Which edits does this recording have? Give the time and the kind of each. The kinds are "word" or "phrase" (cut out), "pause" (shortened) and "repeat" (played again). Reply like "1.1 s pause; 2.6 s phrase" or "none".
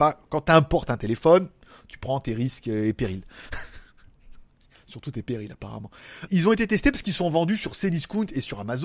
6.3 s word